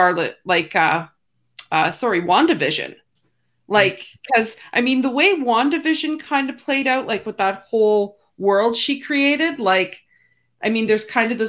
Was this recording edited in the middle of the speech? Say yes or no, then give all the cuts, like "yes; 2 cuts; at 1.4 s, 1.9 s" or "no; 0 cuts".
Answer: no; 0 cuts